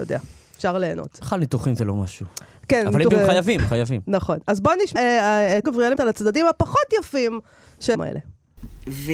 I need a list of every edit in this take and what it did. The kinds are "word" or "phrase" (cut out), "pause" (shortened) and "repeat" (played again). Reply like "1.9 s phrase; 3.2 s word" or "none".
3.1 s word; 3.6 s word; 5.0 s word; 5.6 s word; 6.0 s word; 7.9 s word